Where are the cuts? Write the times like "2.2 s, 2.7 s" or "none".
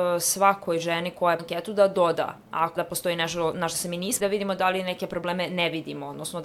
1.4 s, 2.8 s, 4.2 s